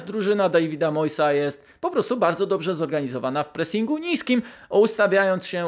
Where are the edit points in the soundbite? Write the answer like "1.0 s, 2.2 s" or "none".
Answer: none